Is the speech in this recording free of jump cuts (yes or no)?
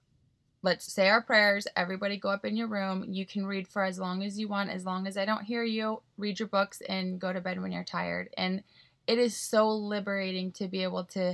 yes